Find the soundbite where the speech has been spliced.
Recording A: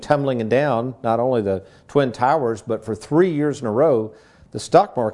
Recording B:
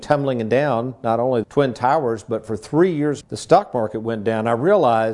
B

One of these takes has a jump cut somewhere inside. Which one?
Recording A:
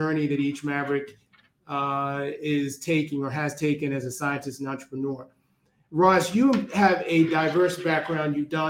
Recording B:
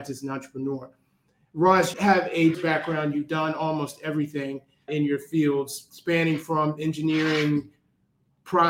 B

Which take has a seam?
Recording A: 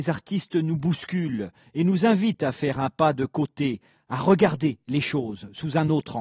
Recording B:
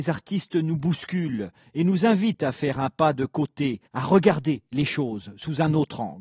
B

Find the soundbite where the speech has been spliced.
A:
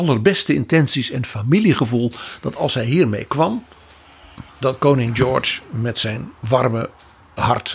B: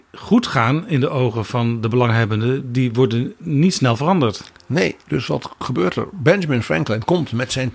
A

